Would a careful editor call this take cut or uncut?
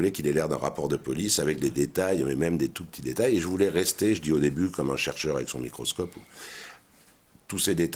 uncut